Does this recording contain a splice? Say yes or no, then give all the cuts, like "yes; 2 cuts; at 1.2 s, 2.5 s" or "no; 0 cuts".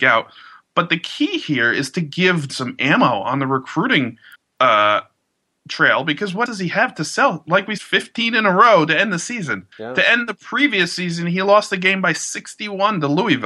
yes; 5 cuts; at 2.5 s, 4.3 s, 6.5 s, 7.8 s, 9.7 s